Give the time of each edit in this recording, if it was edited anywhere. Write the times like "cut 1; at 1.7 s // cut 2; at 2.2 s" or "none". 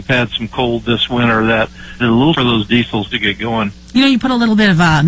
cut 1; at 2.0 s // cut 2; at 2.3 s